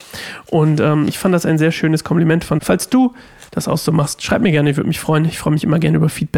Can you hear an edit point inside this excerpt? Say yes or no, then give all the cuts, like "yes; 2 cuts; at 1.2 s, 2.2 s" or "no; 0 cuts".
yes; 2 cuts; at 2.6 s, 3.5 s